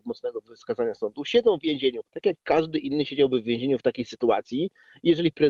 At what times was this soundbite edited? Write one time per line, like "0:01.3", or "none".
0:02.1